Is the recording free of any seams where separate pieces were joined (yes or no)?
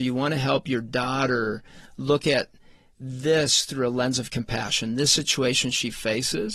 yes